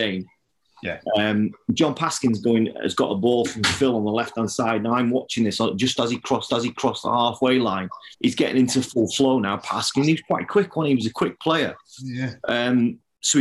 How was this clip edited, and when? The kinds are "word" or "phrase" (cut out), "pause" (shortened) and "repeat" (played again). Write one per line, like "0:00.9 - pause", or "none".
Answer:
0:06.5 - repeat
0:08.1 - pause
0:12.4 - pause